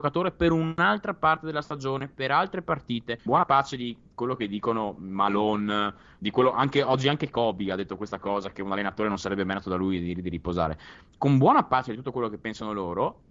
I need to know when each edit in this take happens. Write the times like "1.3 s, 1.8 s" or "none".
3.3 s